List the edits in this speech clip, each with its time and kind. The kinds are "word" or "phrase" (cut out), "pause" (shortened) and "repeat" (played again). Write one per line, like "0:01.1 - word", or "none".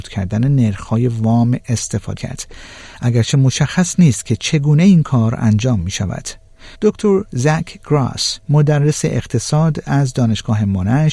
0:02.2 - word
0:06.7 - pause